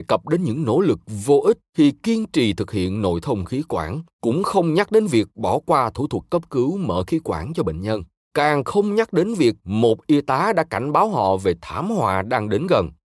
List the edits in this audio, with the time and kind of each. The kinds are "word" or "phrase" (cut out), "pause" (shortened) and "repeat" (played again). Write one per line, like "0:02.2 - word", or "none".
0:04.1 - pause
0:08.2 - pause